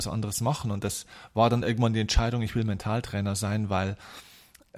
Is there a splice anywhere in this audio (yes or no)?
no